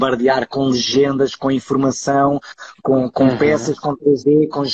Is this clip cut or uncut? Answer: uncut